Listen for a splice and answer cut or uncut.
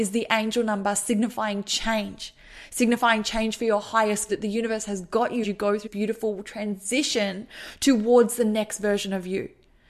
cut